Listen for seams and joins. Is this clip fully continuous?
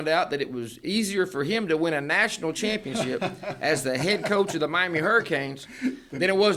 yes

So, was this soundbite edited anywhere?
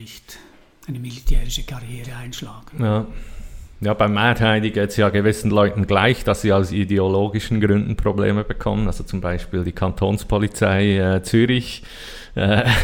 no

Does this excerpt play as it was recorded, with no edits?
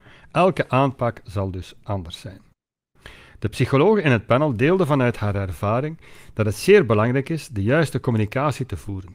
yes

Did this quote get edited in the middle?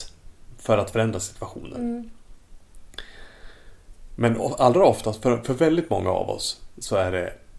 no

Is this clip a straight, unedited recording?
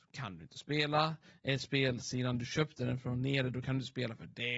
yes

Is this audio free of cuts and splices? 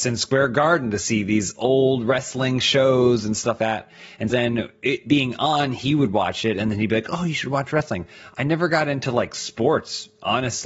no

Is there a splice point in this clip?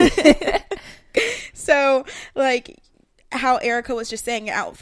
no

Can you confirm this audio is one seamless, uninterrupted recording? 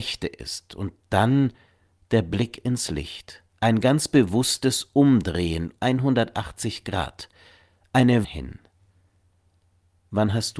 no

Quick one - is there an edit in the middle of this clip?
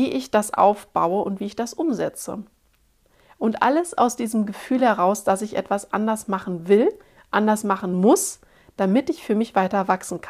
no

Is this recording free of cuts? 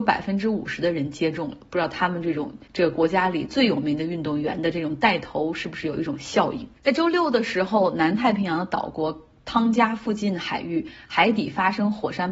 no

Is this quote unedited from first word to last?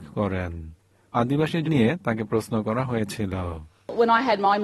no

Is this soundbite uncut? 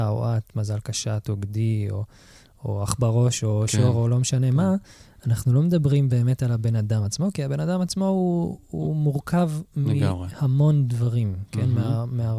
yes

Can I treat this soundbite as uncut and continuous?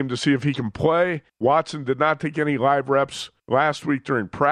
no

